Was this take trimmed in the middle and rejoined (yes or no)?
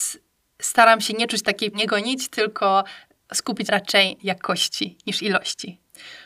yes